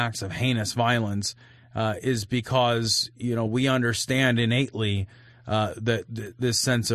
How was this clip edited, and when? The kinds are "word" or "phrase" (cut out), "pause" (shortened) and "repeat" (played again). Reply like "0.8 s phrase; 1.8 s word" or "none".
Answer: none